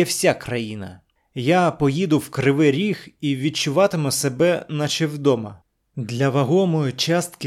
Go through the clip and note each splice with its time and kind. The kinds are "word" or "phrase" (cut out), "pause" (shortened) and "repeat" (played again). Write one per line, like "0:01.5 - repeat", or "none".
0:05.7 - pause